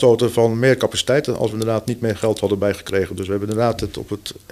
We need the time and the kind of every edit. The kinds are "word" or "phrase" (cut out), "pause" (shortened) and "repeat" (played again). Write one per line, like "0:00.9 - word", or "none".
none